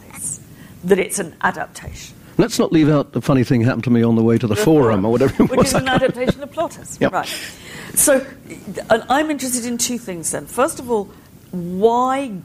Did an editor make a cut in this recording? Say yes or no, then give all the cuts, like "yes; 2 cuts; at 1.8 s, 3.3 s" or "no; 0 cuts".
no; 0 cuts